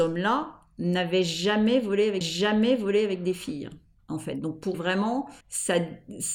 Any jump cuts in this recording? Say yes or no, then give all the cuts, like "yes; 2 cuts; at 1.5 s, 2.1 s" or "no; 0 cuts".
yes; 4 cuts; at 2.2 s, 3.9 s, 4.7 s, 5.4 s